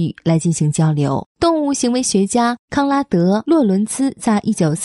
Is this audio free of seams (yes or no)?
no